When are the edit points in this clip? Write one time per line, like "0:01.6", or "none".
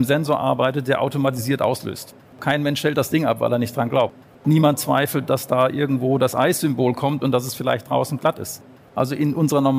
none